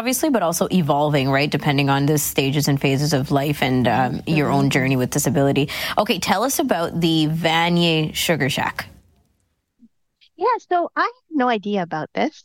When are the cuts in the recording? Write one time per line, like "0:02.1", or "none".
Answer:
none